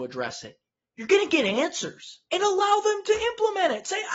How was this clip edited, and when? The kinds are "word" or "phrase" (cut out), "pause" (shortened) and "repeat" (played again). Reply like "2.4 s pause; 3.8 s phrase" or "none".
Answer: 2.3 s pause